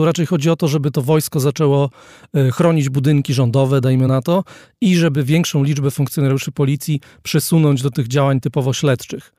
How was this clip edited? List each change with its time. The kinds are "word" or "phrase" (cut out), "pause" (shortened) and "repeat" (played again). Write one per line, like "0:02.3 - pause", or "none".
none